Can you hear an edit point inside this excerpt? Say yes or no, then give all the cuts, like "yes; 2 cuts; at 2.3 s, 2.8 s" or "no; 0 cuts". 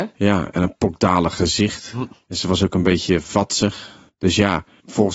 no; 0 cuts